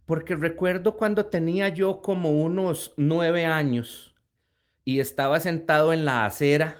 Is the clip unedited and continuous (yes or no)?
yes